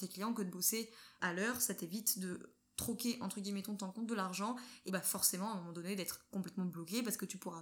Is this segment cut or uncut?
cut